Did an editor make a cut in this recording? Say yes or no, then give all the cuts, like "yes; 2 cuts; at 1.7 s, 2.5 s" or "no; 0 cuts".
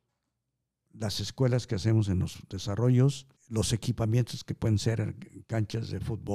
yes; 1 cut; at 3.4 s